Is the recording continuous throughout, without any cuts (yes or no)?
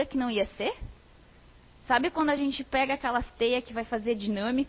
yes